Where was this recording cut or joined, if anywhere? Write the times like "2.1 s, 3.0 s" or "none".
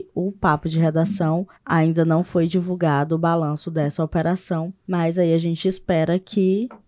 1.5 s, 4.8 s